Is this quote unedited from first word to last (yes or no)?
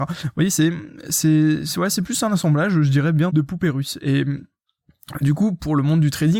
no